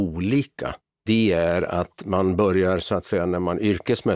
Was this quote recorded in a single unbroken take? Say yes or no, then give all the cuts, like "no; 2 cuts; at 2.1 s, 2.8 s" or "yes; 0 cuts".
yes; 0 cuts